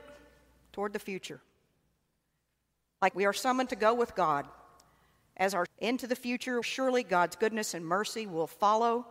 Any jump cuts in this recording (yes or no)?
yes